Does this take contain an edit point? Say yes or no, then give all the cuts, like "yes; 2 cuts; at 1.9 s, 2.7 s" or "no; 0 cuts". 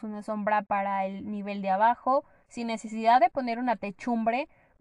no; 0 cuts